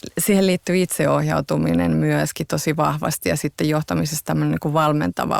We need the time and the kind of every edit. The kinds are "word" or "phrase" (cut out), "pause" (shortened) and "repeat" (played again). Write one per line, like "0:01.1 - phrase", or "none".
none